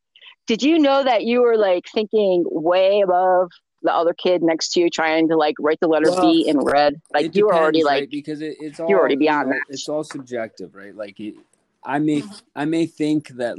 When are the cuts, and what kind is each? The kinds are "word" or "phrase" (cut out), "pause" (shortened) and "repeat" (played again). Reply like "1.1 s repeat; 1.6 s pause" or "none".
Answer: none